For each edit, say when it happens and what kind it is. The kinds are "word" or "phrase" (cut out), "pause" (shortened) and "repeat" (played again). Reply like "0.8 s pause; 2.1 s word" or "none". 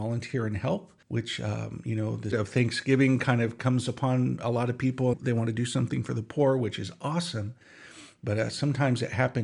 1.0 s pause; 2.3 s word; 5.1 s phrase